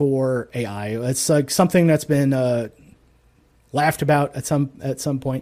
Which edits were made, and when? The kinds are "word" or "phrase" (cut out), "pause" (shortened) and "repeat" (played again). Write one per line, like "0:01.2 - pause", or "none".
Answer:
none